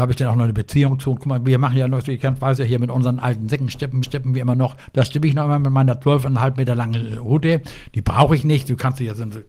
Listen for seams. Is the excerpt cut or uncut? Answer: cut